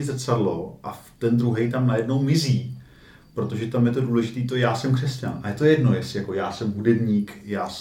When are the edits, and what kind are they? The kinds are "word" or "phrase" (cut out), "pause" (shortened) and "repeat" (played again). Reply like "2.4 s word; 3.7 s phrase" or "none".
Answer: none